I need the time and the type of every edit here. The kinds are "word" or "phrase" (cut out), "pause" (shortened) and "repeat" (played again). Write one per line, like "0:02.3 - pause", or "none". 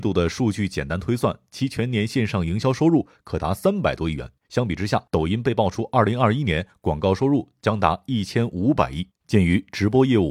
0:04.4 - pause
0:05.1 - pause
0:09.1 - pause